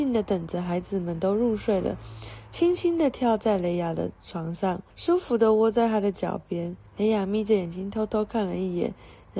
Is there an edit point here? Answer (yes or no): yes